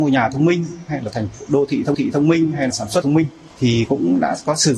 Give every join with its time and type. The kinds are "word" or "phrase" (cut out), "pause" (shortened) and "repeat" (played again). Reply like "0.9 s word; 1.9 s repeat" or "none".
1.9 s repeat; 2.7 s word; 3.0 s phrase; 3.5 s pause

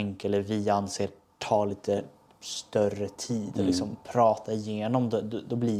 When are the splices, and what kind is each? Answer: none

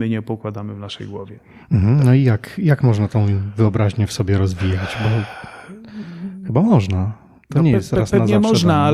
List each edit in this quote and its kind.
none

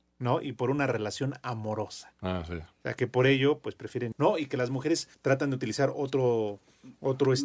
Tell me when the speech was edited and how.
4.1 s phrase; 5.1 s pause

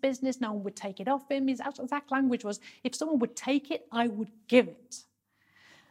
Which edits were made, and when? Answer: none

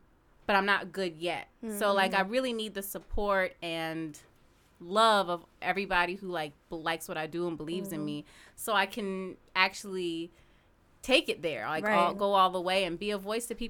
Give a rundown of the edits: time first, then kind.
none

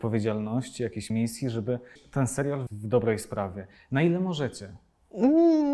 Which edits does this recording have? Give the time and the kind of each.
1.1 s word; 2.0 s word; 2.7 s word

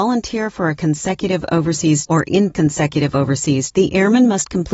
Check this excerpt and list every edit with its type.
2.1 s word; 2.5 s word; 3.7 s word

